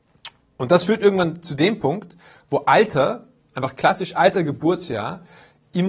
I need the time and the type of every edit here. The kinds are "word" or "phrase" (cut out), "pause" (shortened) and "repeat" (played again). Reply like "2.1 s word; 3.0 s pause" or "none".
none